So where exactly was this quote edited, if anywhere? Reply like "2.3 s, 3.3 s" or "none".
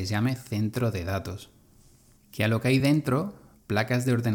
none